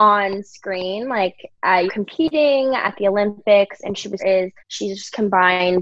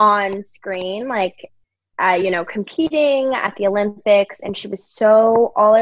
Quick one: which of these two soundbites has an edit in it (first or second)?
first